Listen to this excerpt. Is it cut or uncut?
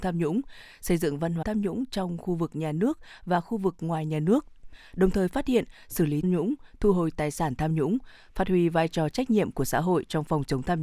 cut